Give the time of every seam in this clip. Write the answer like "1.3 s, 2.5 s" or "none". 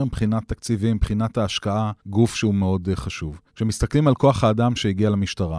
2.0 s, 3.5 s